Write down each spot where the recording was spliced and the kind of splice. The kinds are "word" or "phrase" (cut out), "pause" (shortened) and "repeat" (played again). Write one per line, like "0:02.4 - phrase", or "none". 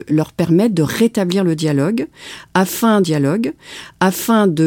0:03.0 - repeat

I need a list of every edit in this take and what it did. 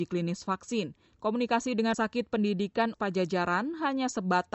0:01.9 - word
0:02.9 - word

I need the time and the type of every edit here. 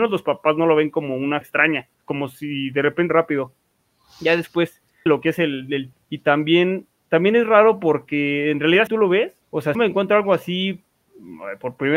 0:01.4 - word
0:01.9 - pause
0:03.1 - phrase
0:05.1 - word
0:05.9 - word
0:08.9 - word
0:09.4 - pause
0:09.7 - phrase

